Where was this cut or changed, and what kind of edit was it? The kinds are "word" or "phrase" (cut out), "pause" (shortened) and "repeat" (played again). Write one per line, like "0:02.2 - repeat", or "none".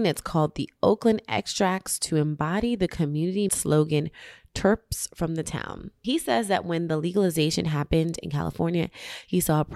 0:03.5 - word

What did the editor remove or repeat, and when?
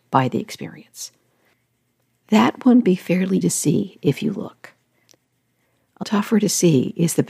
0:02.8 - word
0:03.4 - word
0:06.0 - word

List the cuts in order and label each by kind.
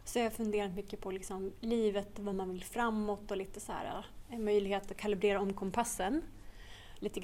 none

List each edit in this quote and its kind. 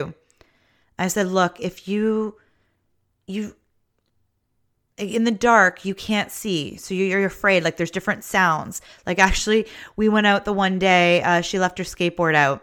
none

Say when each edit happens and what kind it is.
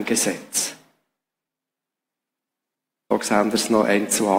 none

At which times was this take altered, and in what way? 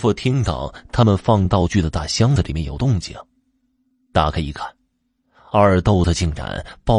none

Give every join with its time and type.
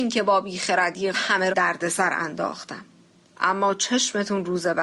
0:01.1 - phrase
0:01.5 - phrase
0:03.0 - pause

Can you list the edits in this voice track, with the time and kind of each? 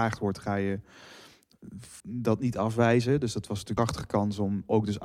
0:02.0 - pause
0:03.8 - word

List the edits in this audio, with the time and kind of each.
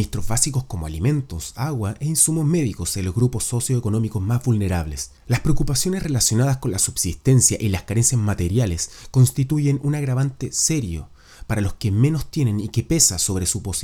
0:05.2 - pause

